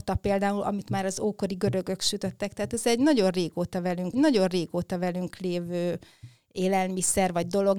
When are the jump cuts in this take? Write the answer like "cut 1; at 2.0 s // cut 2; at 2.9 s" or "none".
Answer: cut 1; at 4.1 s

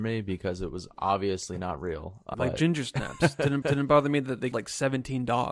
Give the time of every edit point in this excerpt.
cut 1; at 2.3 s // cut 2; at 3.6 s // cut 3; at 4.5 s

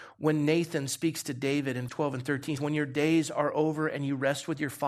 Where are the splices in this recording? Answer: cut 1; at 1.9 s // cut 2; at 2.6 s

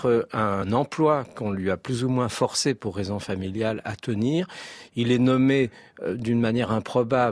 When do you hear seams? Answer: none

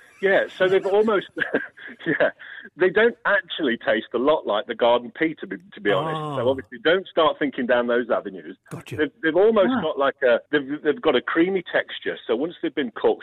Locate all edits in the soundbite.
cut 1; at 10.5 s

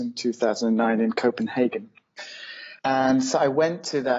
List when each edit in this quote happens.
cut 1; at 2.8 s

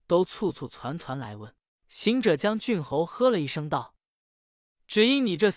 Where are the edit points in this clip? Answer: cut 1; at 1.7 s

